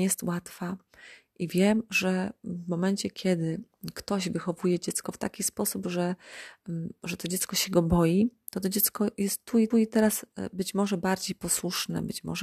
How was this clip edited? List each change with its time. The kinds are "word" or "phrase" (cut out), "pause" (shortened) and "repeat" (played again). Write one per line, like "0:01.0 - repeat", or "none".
0:09.7 - repeat